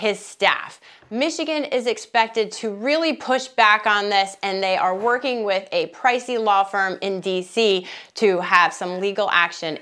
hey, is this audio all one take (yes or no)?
yes